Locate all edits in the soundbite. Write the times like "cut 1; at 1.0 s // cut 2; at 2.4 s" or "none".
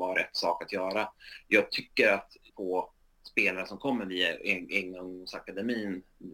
cut 1; at 2.5 s